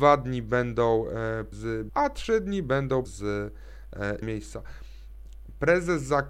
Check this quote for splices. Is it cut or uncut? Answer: cut